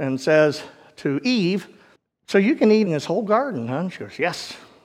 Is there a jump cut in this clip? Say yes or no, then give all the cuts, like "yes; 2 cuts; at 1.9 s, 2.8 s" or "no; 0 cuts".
yes; 2 cuts; at 2.0 s, 2.9 s